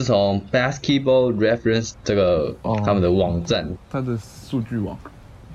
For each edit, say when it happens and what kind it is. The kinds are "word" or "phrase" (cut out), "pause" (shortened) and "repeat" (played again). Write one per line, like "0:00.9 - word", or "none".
0:01.9 - phrase
0:03.8 - pause